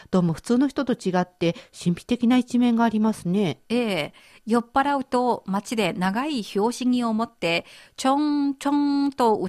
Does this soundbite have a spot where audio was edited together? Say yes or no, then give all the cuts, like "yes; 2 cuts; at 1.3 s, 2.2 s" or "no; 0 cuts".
no; 0 cuts